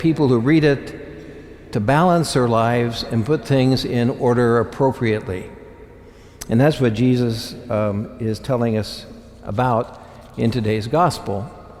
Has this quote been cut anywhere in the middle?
no; 0 cuts

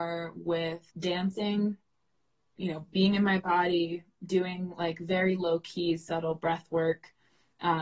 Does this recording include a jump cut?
yes; 1 cut; at 0.9 s

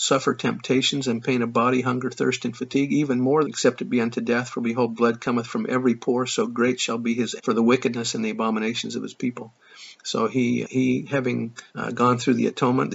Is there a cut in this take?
yes; 4 cuts; at 3.4 s, 7.4 s, 10.6 s, 11.7 s

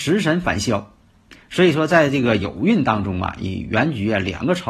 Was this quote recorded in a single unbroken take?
yes; 0 cuts

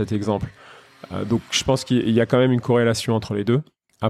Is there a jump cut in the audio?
no; 0 cuts

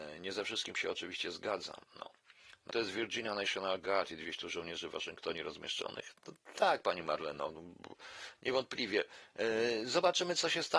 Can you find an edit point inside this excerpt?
yes; 1 cut; at 2.7 s

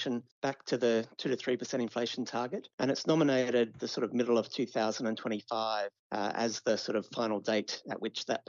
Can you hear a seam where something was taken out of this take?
no; 0 cuts

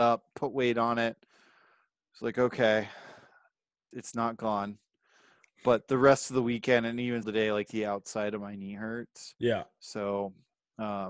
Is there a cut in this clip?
yes; 2 cuts; at 3.9 s, 7.2 s

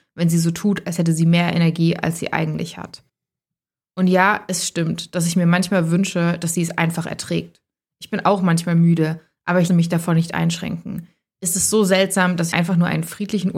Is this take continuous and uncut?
no; 2 cuts; at 9.7 s, 12.5 s

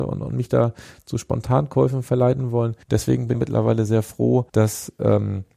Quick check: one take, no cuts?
no; 3 cuts; at 2.8 s, 3.3 s, 4.5 s

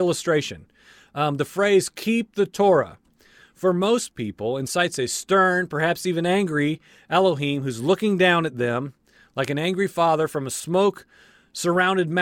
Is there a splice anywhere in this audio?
no; 0 cuts

